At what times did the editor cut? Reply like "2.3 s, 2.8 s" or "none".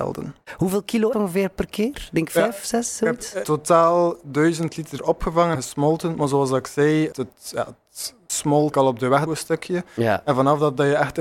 1.1 s, 3.4 s, 5.0 s, 5.5 s, 7.1 s, 8.3 s, 8.7 s, 9.3 s